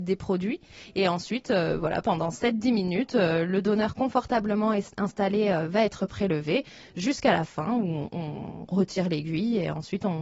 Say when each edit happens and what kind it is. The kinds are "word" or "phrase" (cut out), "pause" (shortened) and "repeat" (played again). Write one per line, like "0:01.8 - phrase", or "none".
none